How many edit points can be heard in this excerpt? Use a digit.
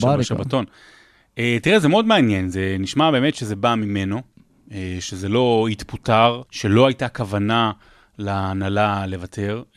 1